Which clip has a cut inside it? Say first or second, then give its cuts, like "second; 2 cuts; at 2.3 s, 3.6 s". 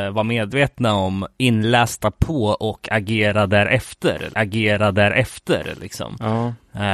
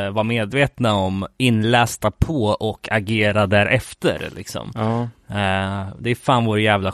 first; 1 cut; at 4.3 s